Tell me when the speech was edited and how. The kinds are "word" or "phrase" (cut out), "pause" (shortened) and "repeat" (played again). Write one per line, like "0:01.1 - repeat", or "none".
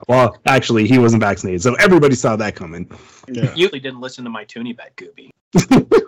0:03.7 - phrase